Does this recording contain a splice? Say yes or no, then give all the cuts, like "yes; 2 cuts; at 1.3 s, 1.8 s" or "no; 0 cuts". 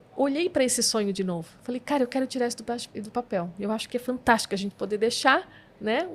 no; 0 cuts